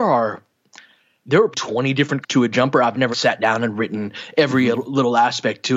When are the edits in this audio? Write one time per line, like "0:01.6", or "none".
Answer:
0:01.5
0:02.2
0:03.1